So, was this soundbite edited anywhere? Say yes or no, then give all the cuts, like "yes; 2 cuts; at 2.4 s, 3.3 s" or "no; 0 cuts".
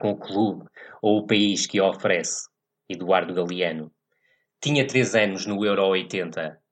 no; 0 cuts